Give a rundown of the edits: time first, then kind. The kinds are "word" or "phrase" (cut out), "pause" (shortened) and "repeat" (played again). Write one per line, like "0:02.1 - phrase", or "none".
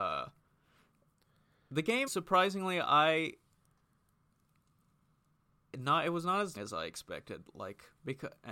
0:02.1 - word
0:06.6 - word

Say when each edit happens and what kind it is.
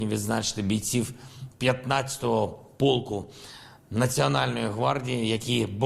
none

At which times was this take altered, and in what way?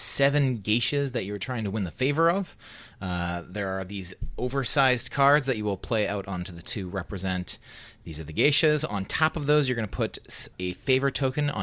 0:06.6 - word
0:10.5 - word

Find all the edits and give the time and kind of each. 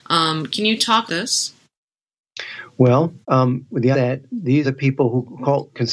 0:01.1 - phrase
0:03.2 - pause
0:03.9 - phrase
0:04.6 - word

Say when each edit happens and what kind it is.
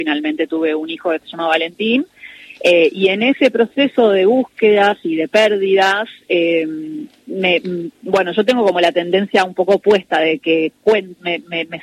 0:07.9 - pause

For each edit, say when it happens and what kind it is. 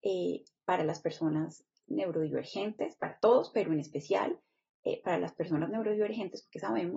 none

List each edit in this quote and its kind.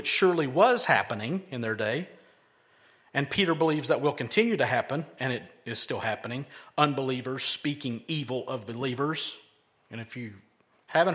none

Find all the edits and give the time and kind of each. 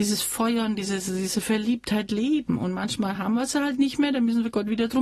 none

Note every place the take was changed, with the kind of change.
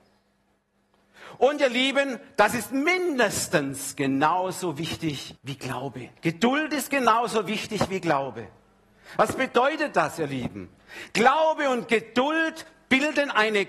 0:05.4 - pause
0:06.2 - pause

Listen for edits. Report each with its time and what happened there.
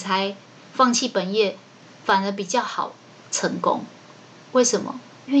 none

